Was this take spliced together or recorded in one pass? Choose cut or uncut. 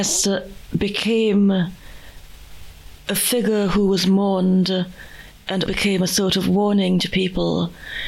cut